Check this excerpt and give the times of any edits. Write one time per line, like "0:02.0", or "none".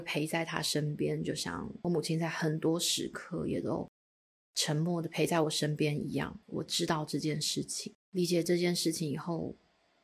0:01.8
0:06.4
0:08.0